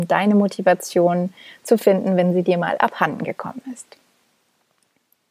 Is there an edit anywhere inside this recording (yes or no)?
no